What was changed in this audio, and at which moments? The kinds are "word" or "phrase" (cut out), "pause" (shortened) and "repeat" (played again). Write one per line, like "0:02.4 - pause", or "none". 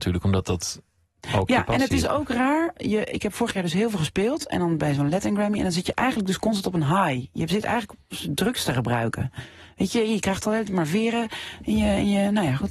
none